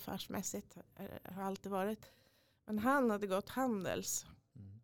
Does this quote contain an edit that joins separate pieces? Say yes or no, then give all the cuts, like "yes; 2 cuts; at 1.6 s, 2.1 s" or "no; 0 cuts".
no; 0 cuts